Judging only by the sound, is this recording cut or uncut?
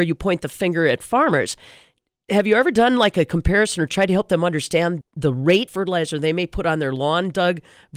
cut